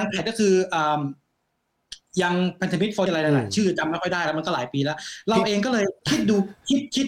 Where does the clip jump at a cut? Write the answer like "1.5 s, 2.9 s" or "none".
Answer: 3.1 s, 6.0 s